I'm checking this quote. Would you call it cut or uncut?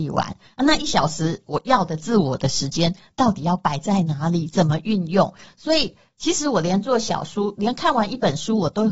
uncut